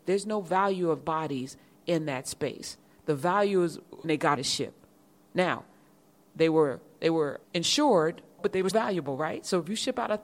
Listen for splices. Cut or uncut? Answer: cut